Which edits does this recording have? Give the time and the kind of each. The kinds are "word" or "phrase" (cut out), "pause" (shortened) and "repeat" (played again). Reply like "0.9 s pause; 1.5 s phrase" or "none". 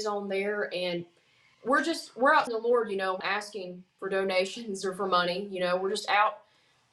1.5 s word; 2.5 s word; 3.2 s word